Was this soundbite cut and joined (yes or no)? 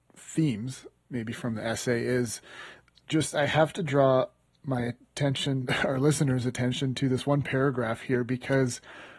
no